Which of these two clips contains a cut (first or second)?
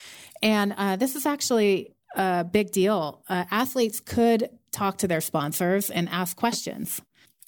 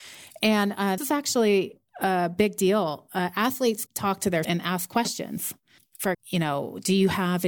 second